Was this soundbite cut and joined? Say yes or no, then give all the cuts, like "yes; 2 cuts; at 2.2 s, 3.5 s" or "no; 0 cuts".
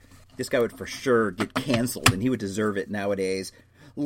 no; 0 cuts